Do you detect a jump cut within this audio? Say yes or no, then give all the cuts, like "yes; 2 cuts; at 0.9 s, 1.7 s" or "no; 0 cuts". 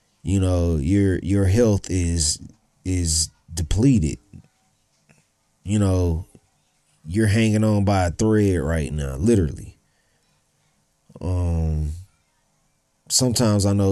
no; 0 cuts